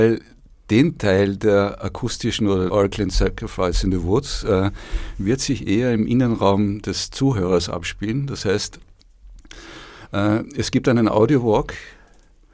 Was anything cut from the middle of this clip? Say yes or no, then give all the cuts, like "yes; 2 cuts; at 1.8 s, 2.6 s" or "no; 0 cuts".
yes; 1 cut; at 2.7 s